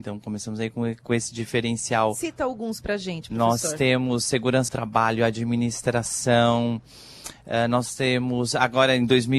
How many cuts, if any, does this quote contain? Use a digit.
1